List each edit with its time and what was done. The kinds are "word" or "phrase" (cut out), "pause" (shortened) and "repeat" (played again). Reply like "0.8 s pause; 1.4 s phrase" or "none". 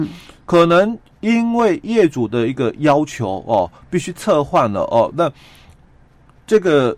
none